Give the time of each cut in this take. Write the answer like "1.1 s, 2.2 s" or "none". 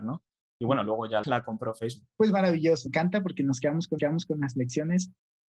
1.2 s, 2.1 s, 2.9 s, 4.0 s